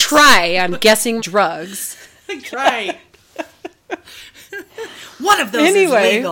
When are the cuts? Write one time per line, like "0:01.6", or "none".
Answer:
0:01.2
0:02.5
0:04.5